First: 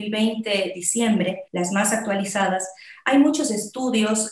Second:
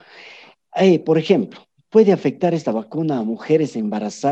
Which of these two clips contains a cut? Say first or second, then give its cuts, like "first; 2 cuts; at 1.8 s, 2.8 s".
first; 1 cut; at 1.5 s